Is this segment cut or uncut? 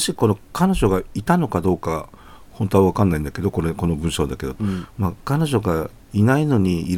cut